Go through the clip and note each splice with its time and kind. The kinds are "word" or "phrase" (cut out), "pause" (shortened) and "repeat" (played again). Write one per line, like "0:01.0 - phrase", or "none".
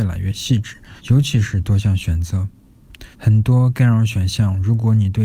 0:01.0 - pause
0:03.1 - pause